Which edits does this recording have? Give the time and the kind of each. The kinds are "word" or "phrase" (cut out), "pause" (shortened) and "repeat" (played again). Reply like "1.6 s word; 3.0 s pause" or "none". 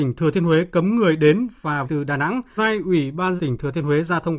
1.8 s word; 2.6 s word; 3.4 s word